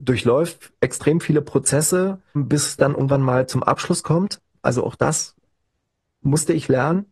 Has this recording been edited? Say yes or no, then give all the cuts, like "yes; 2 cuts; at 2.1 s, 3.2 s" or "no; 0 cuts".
yes; 1 cut; at 2.4 s